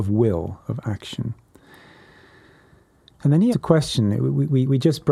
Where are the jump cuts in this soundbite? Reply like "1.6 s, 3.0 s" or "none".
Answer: 3.5 s